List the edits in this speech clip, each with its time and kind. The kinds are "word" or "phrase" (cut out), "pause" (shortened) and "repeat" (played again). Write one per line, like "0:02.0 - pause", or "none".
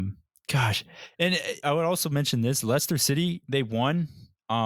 0:01.6 - word